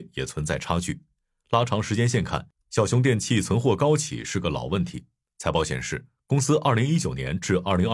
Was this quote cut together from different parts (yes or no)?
no